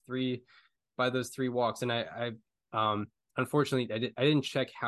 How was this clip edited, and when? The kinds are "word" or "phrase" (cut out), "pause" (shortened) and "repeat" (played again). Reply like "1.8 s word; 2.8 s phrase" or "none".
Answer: none